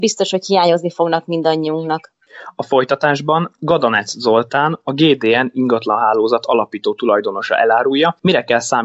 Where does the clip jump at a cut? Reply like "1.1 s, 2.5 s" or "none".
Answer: none

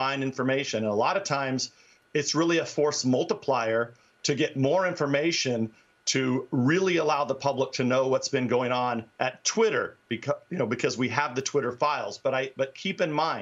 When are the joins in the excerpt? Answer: none

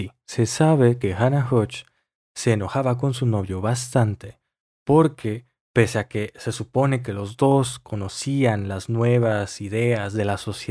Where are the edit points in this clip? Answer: none

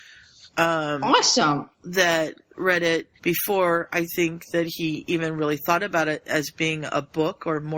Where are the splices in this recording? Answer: 1.7 s, 3.2 s

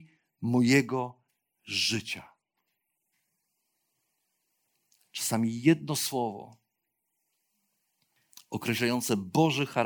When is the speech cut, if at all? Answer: none

